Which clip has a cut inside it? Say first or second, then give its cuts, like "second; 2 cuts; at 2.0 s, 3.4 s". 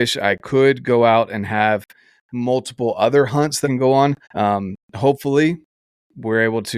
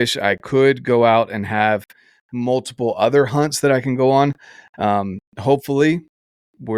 first; 2 cuts; at 3.6 s, 4.2 s